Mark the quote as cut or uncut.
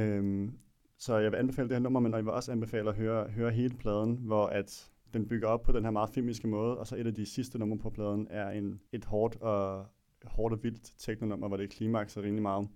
cut